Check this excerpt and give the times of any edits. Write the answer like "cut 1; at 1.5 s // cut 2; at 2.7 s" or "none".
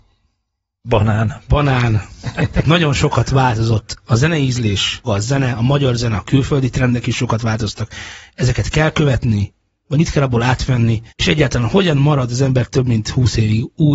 cut 1; at 5.0 s // cut 2; at 9.9 s // cut 3; at 11.1 s